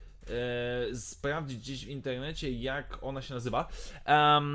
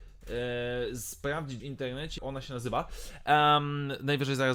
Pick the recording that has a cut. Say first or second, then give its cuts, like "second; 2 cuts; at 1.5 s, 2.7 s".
second; 2 cuts; at 1.6 s, 2.2 s